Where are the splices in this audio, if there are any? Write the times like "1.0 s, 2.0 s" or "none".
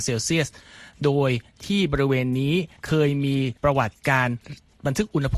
2.8 s, 3.6 s